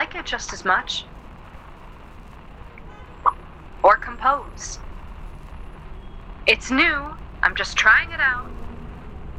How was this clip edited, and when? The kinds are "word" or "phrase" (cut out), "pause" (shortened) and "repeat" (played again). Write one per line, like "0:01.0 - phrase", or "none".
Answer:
none

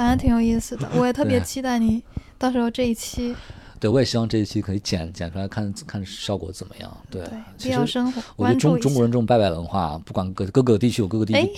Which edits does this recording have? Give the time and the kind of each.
none

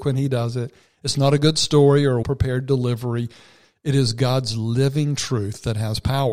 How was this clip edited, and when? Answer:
0:02.2 - word

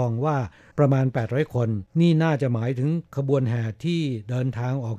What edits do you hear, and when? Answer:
0:01.9 - pause

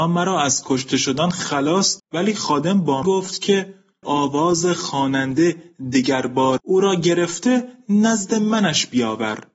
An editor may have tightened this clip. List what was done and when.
0:02.0 - word
0:03.0 - word
0:04.0 - word
0:06.6 - word

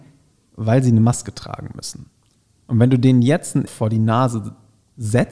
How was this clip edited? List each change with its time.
0:03.7 - word

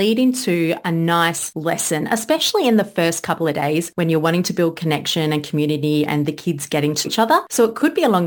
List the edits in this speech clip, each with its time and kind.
0:07.0 - word

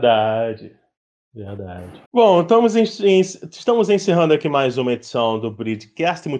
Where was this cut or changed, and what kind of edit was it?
0:02.1 - pause

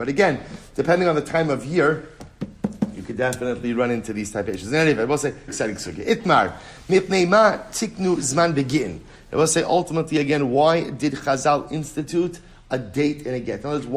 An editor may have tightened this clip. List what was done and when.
0:05.5 - word

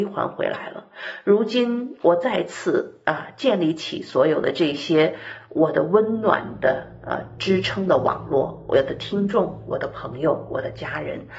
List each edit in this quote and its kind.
none

